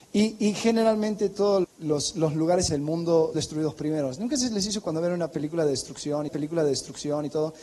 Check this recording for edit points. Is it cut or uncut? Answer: cut